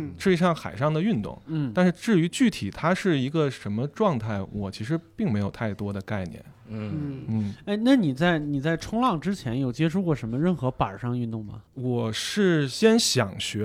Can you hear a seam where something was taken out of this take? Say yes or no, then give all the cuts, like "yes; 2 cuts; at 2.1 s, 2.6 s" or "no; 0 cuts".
yes; 1 cut; at 11.7 s